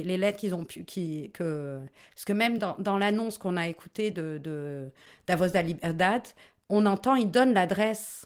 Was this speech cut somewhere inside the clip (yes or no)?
no